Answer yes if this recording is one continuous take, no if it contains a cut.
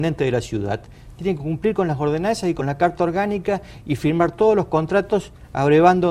yes